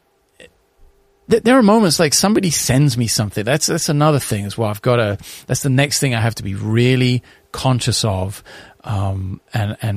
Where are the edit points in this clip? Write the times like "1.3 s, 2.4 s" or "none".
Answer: none

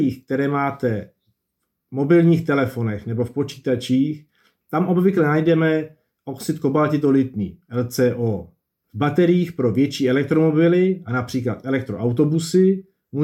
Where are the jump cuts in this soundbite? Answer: none

